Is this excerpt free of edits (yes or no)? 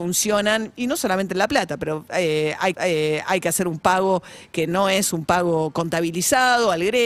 no